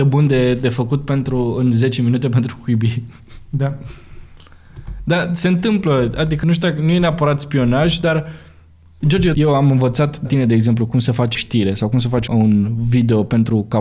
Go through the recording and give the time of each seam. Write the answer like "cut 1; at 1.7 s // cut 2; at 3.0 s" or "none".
cut 1; at 6.4 s // cut 2; at 9.3 s // cut 3; at 10.2 s // cut 4; at 11.3 s // cut 5; at 12.3 s

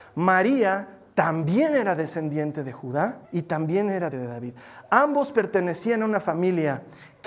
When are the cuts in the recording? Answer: cut 1; at 3.2 s // cut 2; at 4.1 s

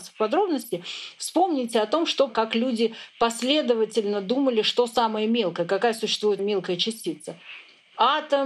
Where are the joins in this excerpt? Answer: cut 1; at 2.3 s // cut 2; at 6.4 s

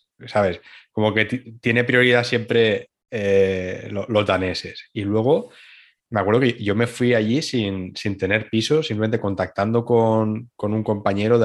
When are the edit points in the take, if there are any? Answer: none

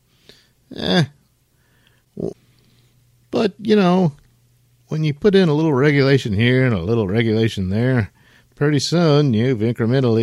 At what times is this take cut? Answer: none

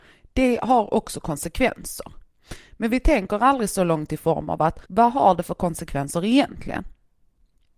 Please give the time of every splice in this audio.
cut 1; at 4.9 s

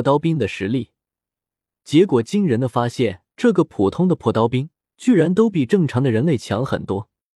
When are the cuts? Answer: cut 1; at 3.3 s // cut 2; at 4.8 s

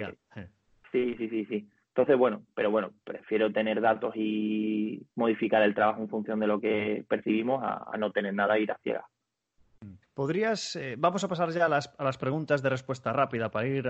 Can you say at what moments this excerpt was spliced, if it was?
cut 1; at 5.1 s // cut 2; at 10.0 s

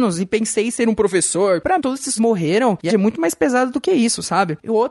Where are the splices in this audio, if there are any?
cut 1; at 1.8 s // cut 2; at 2.2 s // cut 3; at 2.9 s

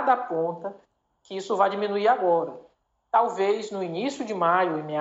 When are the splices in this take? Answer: none

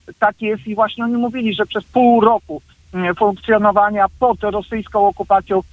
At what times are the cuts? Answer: cut 1; at 1.8 s

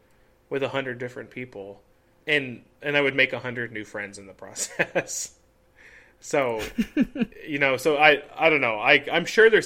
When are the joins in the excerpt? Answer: none

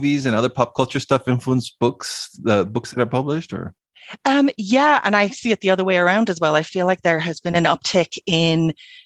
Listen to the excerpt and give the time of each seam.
none

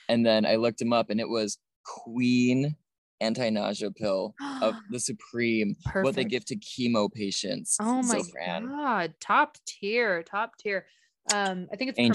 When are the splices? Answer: none

